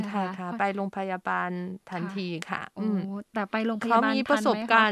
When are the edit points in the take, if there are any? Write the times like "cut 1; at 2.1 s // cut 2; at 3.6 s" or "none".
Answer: none